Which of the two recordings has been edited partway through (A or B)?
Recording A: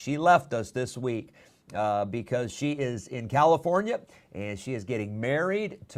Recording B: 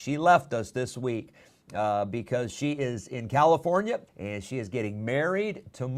B